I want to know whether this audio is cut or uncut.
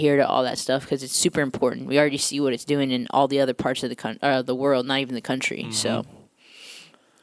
uncut